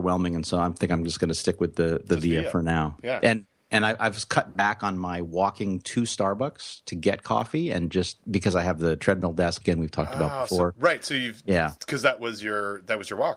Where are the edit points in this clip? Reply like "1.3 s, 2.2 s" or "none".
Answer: 9.6 s